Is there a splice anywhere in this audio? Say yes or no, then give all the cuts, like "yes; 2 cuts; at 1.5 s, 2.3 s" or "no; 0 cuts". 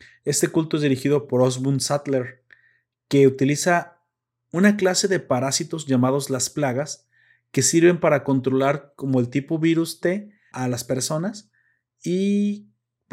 yes; 1 cut; at 10.5 s